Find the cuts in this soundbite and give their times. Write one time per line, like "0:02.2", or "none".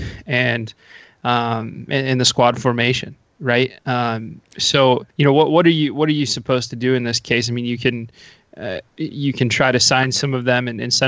0:03.8
0:05.1
0:08.9